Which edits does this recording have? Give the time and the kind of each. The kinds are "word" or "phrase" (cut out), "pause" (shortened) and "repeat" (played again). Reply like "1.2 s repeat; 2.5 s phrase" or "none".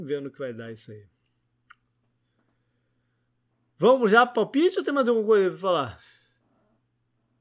none